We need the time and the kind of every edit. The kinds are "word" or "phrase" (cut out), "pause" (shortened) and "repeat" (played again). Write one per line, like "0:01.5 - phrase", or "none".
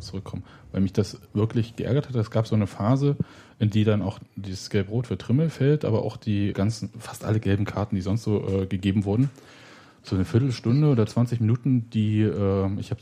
0:06.5 - word